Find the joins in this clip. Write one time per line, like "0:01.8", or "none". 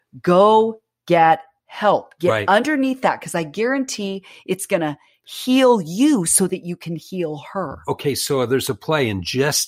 none